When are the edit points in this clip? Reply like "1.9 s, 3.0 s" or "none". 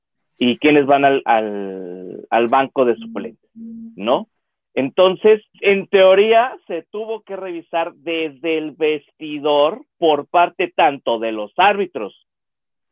5.5 s, 9.9 s